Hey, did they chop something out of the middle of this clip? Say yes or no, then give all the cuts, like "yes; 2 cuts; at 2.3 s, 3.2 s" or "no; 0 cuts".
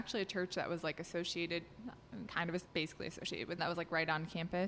yes; 3 cuts; at 2.3 s, 2.7 s, 3.6 s